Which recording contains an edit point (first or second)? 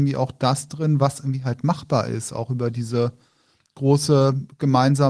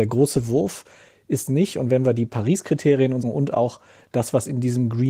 second